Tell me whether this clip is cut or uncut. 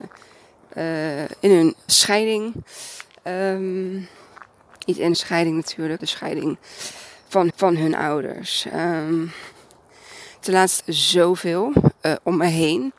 cut